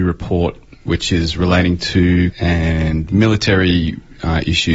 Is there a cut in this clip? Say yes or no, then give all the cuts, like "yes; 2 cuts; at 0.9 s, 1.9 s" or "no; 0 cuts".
yes; 1 cut; at 2.3 s